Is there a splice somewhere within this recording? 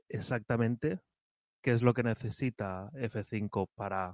no; 0 cuts

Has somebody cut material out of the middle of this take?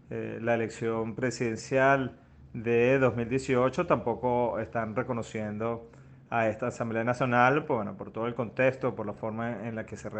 no; 0 cuts

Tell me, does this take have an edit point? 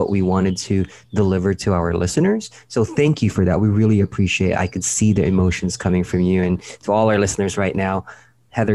no; 0 cuts

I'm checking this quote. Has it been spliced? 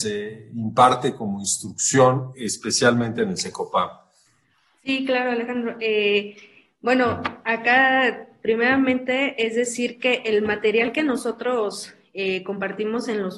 no; 0 cuts

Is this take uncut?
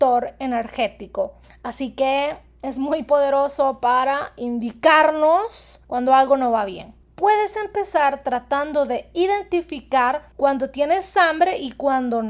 no; 4 cuts; at 1.4 s, 5.8 s, 7.0 s, 10.3 s

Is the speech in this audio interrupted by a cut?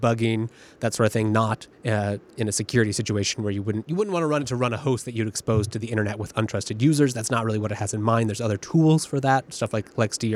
yes; 1 cut; at 1.7 s

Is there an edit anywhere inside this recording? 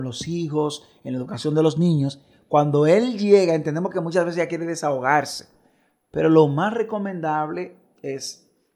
no; 0 cuts

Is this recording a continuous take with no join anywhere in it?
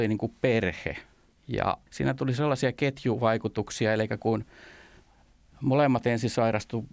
no; 1 cut; at 6.0 s

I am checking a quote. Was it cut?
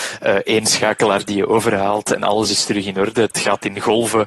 no; 0 cuts

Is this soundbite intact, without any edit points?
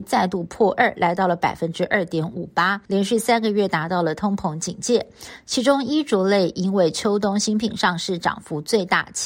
no; 1 cut; at 2.9 s

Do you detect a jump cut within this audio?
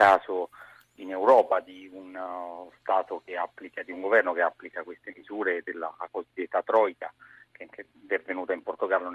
no; 0 cuts

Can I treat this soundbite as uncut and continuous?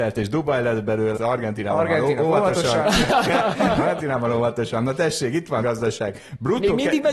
no; 2 cuts; at 1.1 s, 5.6 s

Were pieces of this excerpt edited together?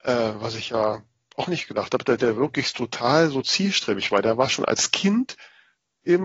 no; 0 cuts

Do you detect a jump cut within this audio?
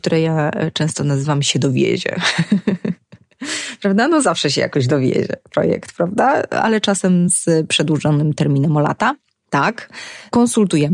no; 0 cuts

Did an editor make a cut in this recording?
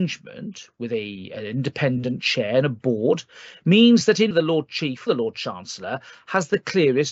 yes; 2 cuts; at 4.3 s, 5.1 s

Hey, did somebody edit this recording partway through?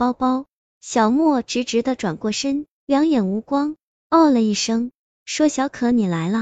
no; 0 cuts

